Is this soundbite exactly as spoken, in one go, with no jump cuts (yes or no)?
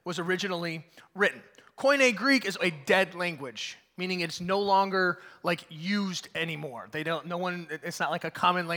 no